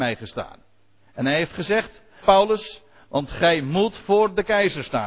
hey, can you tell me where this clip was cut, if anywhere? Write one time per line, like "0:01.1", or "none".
0:02.2